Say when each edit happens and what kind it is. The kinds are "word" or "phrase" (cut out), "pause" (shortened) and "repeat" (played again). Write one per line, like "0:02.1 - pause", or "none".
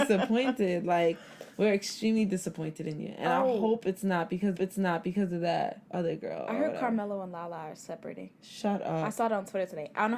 0:01.5 - pause
0:04.5 - repeat
0:05.9 - pause